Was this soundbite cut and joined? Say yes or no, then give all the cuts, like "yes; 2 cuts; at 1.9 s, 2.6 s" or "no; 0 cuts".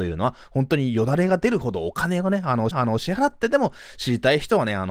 yes; 1 cut; at 2.7 s